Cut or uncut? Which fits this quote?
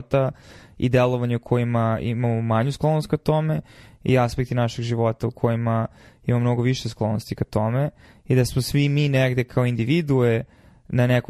uncut